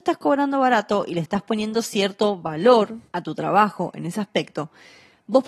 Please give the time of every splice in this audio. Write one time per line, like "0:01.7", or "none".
0:03.1